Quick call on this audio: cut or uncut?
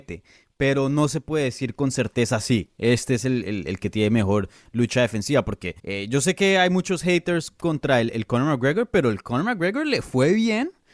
cut